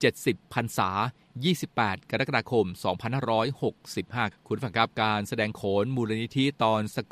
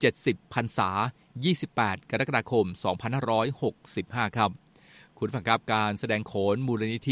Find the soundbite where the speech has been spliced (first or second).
first